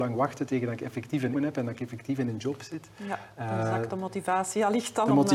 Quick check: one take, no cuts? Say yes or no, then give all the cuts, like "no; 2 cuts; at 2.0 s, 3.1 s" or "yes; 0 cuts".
no; 1 cut; at 1.3 s